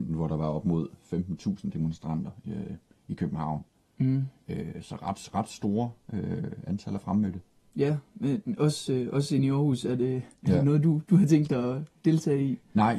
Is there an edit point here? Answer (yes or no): no